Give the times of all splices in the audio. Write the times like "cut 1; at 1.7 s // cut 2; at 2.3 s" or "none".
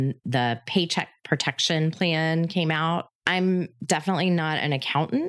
cut 1; at 3.1 s